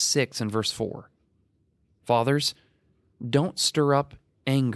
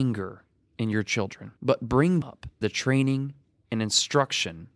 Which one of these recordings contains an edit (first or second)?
second